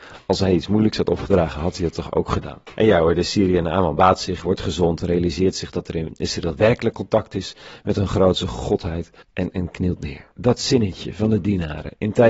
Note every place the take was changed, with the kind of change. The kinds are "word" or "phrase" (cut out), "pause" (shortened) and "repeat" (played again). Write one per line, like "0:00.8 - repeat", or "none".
0:02.7 - pause
0:09.2 - pause
0:10.3 - pause